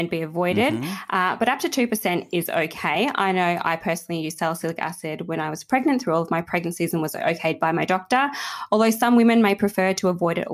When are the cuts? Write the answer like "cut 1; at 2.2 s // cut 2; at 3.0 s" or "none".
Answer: none